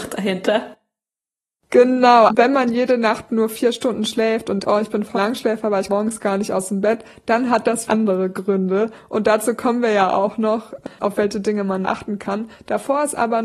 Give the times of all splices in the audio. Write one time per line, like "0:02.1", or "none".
0:02.3
0:04.6
0:05.1
0:05.9
0:07.9
0:11.8